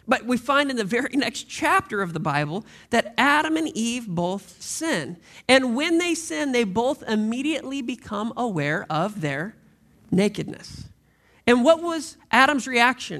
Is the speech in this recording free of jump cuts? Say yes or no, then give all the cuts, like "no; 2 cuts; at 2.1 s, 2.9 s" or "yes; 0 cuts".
yes; 0 cuts